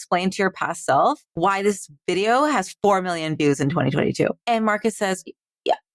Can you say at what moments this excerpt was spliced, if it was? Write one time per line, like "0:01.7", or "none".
0:01.3
0:04.4